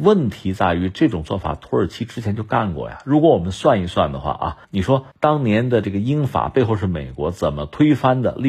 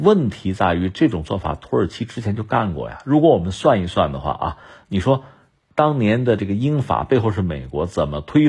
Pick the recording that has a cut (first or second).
first